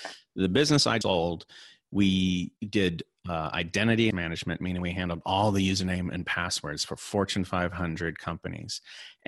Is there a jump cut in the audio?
yes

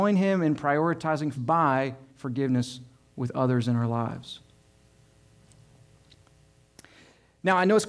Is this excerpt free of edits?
no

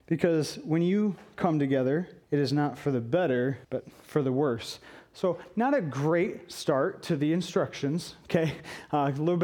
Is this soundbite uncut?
no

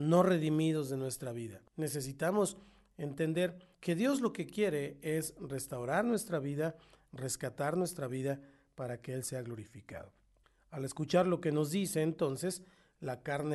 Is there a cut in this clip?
yes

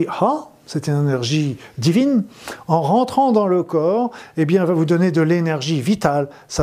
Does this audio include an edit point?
no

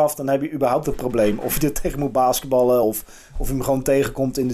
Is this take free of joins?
yes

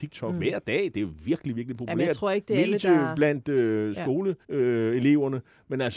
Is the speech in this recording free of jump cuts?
no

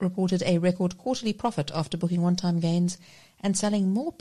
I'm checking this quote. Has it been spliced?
no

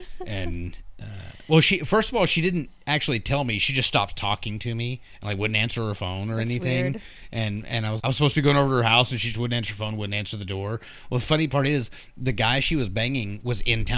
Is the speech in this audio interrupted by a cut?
yes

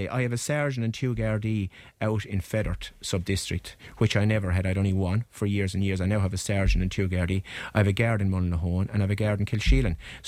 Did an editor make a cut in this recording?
no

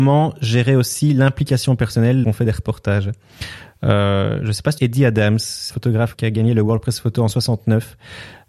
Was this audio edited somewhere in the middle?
yes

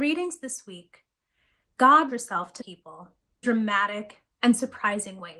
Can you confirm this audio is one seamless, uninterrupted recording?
no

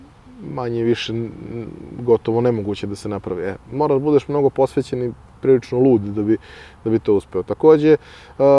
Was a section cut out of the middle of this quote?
no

